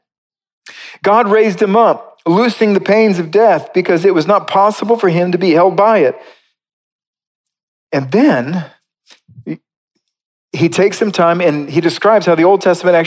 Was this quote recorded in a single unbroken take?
yes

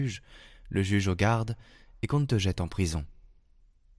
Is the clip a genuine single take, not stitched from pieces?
yes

